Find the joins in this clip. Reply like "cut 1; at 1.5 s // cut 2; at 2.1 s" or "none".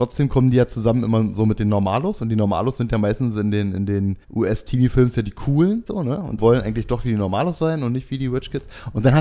cut 1; at 4.2 s // cut 2; at 5.9 s // cut 3; at 6.4 s